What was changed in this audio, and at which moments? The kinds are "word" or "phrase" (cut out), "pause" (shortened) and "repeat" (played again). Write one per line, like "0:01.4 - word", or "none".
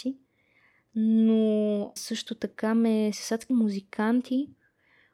0:02.0 - word
0:03.1 - word
0:03.5 - word